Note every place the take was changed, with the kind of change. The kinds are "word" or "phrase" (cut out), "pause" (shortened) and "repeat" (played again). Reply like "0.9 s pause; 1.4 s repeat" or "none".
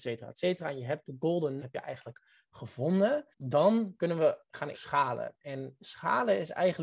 1.6 s word; 3.3 s pause; 4.7 s phrase